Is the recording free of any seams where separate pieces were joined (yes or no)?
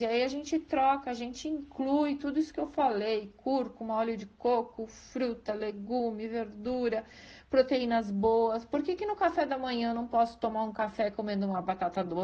yes